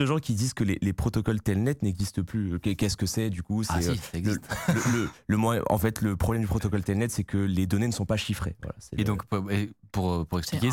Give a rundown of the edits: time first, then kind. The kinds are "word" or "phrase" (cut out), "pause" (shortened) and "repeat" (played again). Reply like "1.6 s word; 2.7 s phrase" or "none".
none